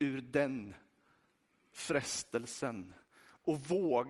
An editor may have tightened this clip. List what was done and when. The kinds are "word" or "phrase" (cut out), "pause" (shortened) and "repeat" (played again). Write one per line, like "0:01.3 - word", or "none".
none

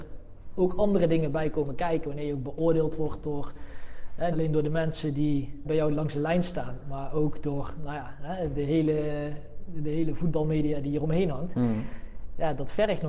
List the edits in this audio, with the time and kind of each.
0:04.3 - word
0:05.6 - word

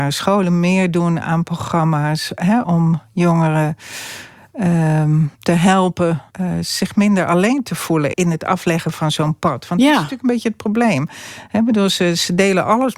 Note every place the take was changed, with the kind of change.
0:02.6 - word
0:05.3 - pause
0:06.3 - pause
0:08.1 - word

